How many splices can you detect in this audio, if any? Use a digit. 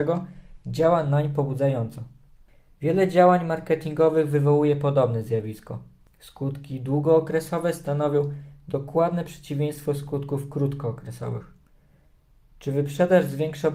0